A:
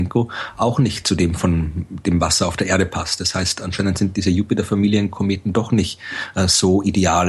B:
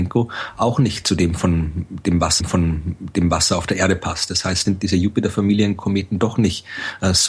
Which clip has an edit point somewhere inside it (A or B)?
B